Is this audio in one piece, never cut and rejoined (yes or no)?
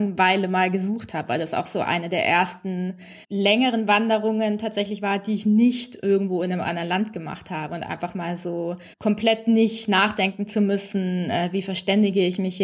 no